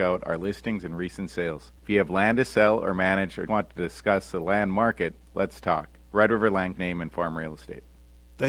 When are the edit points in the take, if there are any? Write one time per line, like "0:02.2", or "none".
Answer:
0:01.8
0:03.5
0:06.8